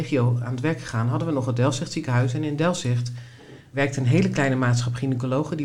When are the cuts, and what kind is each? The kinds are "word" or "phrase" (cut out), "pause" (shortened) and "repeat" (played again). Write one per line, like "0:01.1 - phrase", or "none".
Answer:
none